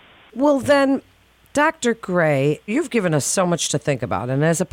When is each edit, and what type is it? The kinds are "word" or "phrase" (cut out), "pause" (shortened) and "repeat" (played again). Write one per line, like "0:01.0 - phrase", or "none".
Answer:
none